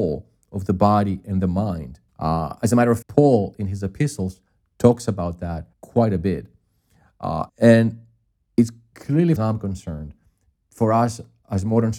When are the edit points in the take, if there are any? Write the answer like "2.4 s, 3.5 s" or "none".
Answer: 2.1 s, 3.0 s, 5.7 s, 7.5 s, 9.4 s